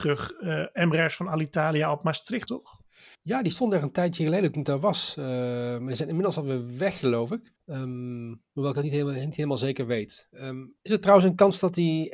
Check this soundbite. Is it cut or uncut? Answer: cut